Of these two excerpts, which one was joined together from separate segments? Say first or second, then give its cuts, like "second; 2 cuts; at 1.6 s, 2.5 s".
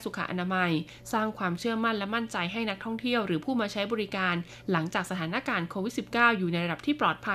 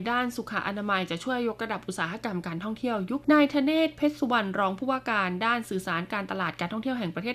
second; 1 cut; at 3.2 s